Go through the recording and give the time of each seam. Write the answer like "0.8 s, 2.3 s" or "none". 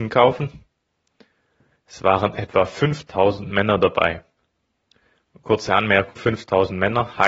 6.2 s